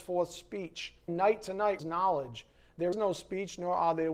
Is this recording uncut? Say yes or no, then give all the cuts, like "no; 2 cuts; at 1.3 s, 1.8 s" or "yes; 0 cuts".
no; 3 cuts; at 1.1 s, 1.8 s, 2.9 s